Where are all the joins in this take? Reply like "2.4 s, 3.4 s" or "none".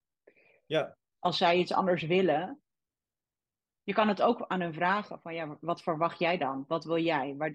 none